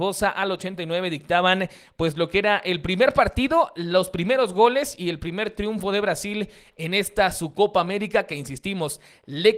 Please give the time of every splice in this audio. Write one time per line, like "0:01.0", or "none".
none